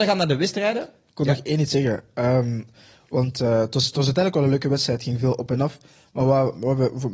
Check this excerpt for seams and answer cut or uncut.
uncut